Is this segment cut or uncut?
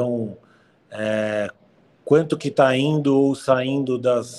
uncut